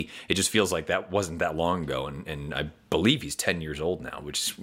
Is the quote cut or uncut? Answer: uncut